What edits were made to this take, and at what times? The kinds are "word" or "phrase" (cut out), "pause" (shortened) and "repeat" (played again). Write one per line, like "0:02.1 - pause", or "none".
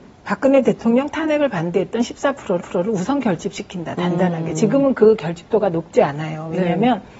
0:02.6 - repeat